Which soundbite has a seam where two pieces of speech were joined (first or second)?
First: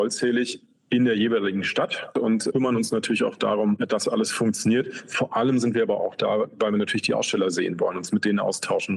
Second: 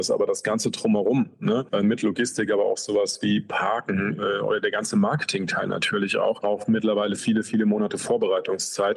second